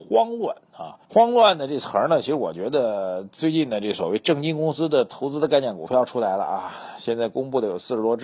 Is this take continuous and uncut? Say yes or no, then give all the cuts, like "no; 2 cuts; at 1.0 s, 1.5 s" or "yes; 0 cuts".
no; 1 cut; at 1.0 s